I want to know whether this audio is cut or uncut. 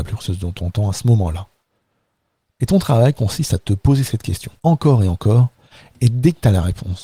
cut